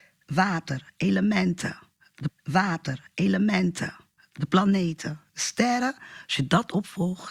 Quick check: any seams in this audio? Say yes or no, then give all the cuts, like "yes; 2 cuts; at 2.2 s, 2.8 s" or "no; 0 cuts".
yes; 1 cut; at 2.3 s